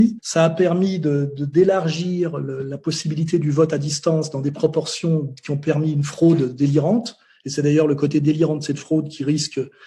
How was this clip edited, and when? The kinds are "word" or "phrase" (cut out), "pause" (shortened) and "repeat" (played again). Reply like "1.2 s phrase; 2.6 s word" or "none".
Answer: none